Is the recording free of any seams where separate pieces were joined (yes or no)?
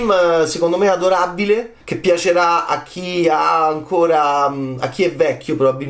no